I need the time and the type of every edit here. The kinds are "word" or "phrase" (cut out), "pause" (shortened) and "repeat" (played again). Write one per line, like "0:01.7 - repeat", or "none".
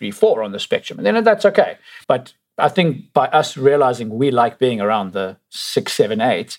0:02.0 - pause